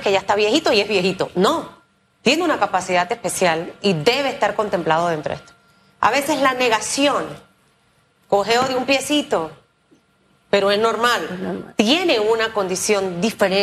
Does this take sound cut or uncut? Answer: uncut